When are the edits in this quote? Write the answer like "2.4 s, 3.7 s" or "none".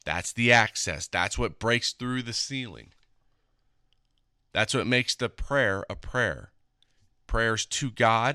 none